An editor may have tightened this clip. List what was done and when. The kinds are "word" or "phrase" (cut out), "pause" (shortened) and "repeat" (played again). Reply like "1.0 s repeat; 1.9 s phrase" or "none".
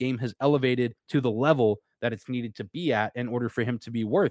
1.0 s pause